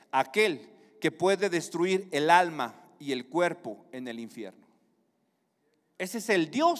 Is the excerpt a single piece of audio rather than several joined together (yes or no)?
yes